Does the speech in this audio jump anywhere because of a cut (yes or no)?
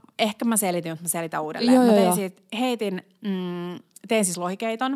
no